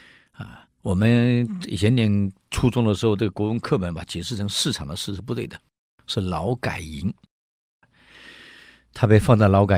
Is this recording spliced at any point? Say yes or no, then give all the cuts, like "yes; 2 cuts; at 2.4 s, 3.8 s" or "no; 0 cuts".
no; 0 cuts